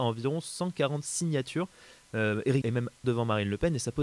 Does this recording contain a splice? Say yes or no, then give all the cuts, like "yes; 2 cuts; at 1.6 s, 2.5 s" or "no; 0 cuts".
yes; 2 cuts; at 2.6 s, 3.0 s